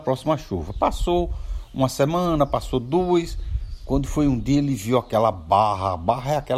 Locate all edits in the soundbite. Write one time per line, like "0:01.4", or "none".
none